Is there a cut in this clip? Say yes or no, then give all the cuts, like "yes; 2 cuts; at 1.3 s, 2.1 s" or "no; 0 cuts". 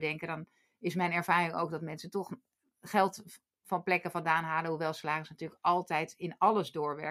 no; 0 cuts